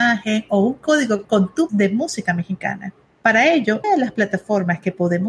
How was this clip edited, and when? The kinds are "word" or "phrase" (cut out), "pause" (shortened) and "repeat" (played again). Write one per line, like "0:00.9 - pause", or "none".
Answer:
0:01.2 - word
0:01.7 - word
0:03.8 - word